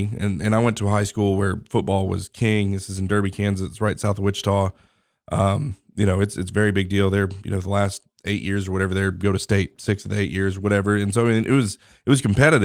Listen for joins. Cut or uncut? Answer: uncut